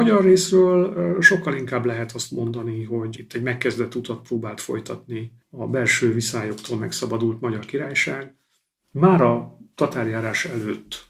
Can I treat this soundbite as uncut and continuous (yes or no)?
yes